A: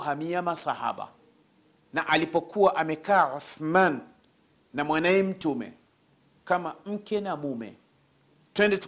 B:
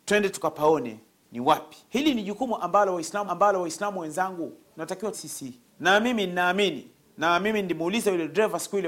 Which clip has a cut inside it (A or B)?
B